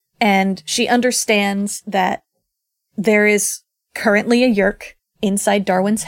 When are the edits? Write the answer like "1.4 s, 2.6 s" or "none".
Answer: none